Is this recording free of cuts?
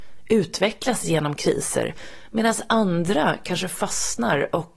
yes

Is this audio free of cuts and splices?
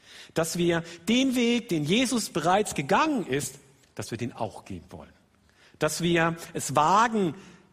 yes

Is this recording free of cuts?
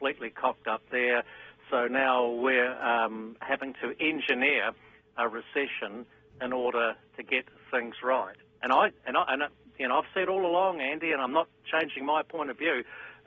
yes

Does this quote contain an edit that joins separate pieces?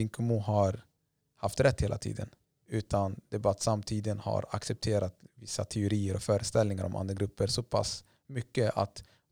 no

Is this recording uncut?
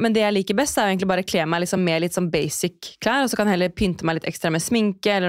yes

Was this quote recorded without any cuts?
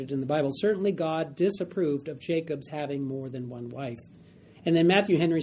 yes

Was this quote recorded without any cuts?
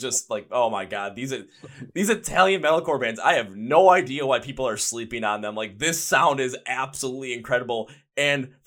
yes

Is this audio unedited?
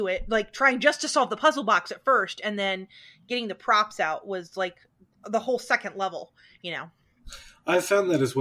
yes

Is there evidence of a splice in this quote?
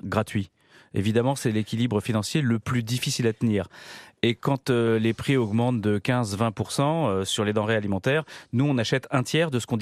no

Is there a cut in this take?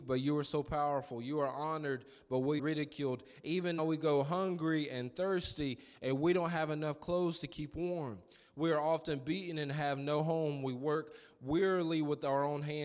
yes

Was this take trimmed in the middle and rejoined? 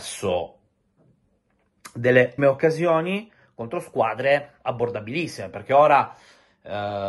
yes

